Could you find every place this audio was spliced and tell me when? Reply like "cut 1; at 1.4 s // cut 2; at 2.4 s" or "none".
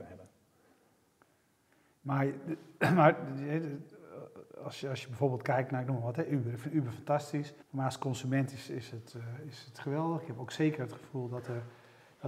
cut 1; at 4.5 s // cut 2; at 7.6 s